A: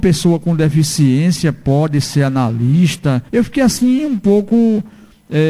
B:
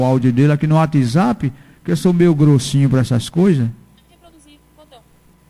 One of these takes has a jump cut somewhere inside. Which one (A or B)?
A